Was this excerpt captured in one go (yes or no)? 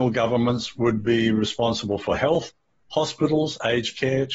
yes